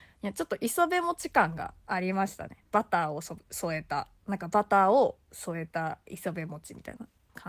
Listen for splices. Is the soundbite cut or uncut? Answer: cut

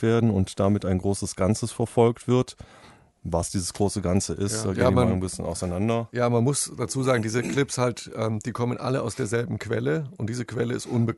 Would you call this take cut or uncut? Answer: uncut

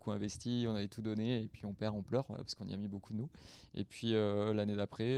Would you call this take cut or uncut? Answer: uncut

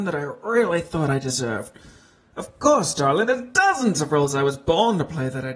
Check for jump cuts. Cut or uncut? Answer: uncut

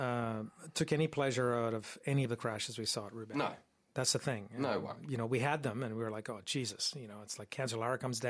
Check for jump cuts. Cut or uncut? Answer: uncut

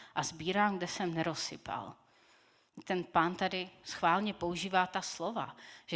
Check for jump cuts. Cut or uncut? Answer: uncut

